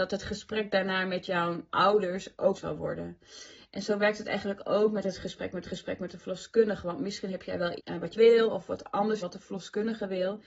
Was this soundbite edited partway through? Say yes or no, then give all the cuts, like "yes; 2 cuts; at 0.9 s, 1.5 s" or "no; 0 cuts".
yes; 6 cuts; at 1.7 s, 2.5 s, 5.6 s, 7.8 s, 8.1 s, 9.2 s